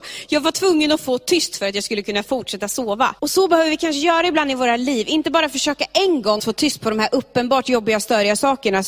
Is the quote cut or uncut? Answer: cut